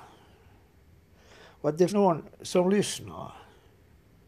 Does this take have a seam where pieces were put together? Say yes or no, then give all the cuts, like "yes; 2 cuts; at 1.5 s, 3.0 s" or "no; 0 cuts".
yes; 1 cut; at 1.9 s